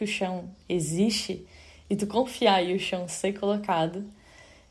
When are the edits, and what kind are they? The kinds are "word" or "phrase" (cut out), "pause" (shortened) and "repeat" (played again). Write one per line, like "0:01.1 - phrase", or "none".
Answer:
none